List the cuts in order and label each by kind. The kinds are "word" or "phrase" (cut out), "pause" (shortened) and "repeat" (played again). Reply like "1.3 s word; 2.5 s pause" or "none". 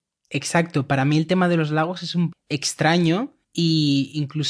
2.3 s word; 3.4 s pause